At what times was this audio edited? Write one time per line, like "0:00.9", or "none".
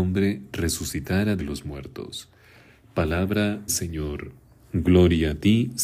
0:01.4
0:03.7